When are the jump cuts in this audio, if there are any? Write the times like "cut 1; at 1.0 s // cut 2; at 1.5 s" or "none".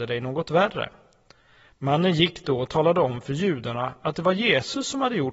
none